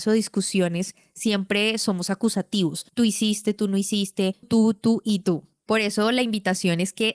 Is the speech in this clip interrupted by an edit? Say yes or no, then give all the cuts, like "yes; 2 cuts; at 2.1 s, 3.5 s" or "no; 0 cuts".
yes; 2 cuts; at 2.9 s, 4.4 s